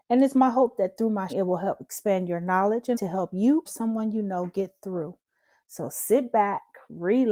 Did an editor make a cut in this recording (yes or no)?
yes